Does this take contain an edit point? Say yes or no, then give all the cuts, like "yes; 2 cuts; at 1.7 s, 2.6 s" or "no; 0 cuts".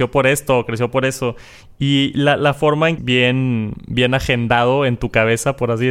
yes; 1 cut; at 3.0 s